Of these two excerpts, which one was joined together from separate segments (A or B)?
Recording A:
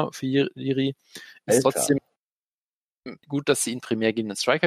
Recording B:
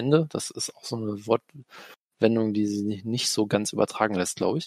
A